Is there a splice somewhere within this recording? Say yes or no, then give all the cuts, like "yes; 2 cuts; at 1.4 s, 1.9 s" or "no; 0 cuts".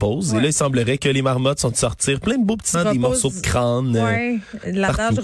yes; 2 cuts; at 1.7 s, 2.7 s